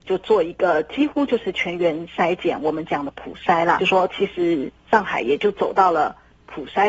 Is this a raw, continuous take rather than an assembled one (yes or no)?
no